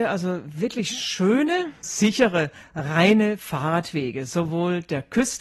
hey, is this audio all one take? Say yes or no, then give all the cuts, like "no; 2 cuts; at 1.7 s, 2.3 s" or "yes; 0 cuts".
yes; 0 cuts